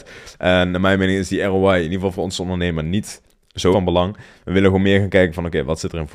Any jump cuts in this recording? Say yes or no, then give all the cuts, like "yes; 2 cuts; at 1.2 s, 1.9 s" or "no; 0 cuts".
yes; 1 cut; at 3.7 s